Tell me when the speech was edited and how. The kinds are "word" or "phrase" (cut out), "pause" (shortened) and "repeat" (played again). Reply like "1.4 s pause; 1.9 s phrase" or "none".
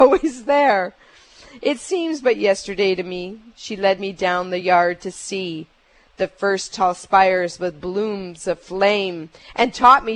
none